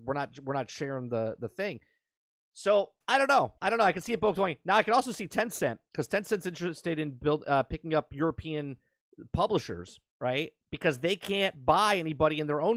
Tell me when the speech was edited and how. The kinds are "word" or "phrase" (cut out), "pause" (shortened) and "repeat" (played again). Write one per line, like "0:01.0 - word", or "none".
0:03.0 - pause
0:03.6 - pause
0:10.1 - pause